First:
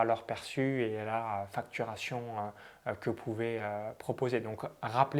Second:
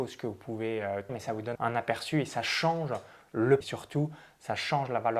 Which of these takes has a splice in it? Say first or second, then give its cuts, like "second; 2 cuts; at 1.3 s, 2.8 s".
second; 3 cuts; at 1.1 s, 1.6 s, 3.6 s